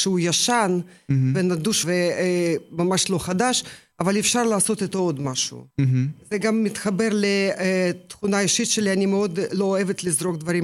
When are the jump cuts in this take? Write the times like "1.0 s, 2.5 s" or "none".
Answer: 1.8 s, 5.7 s

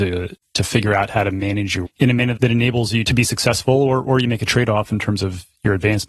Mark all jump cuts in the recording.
1.9 s, 2.4 s, 3.1 s

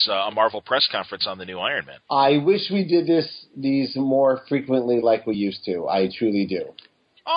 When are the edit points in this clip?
none

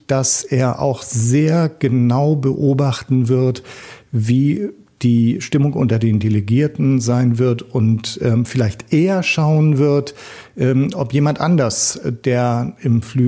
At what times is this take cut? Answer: none

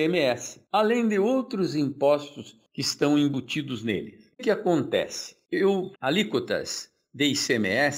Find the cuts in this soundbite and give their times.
4.4 s, 5.9 s

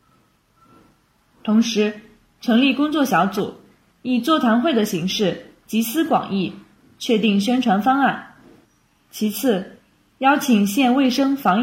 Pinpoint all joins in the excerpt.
none

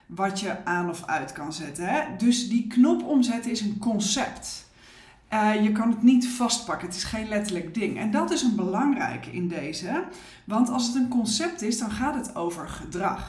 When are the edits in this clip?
none

